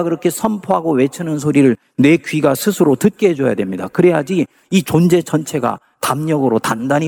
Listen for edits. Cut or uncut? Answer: uncut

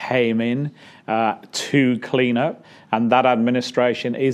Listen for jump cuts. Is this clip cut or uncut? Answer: uncut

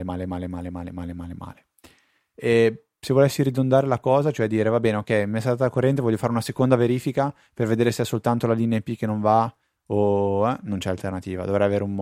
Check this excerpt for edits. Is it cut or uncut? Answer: uncut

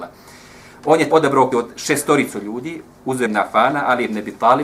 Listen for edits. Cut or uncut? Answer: cut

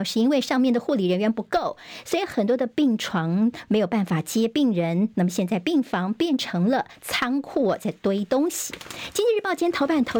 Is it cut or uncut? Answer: uncut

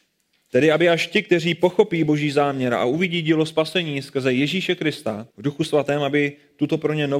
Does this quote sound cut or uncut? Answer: cut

